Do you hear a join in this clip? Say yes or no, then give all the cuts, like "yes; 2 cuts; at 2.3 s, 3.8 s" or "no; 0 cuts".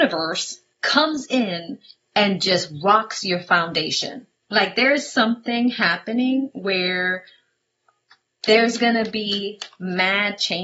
no; 0 cuts